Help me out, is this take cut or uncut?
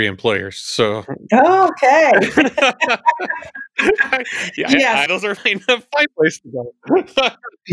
cut